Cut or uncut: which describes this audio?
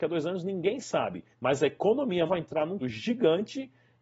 cut